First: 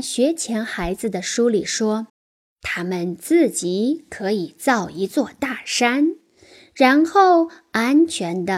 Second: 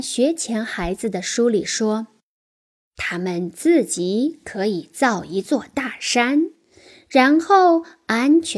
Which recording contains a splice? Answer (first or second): first